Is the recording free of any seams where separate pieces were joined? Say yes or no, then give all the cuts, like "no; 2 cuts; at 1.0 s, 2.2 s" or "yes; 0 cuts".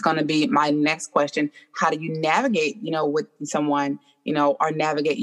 yes; 0 cuts